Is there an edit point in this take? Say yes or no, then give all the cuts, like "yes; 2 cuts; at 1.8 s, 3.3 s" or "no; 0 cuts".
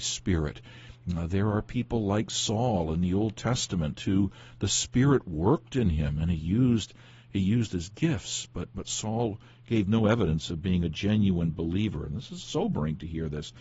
no; 0 cuts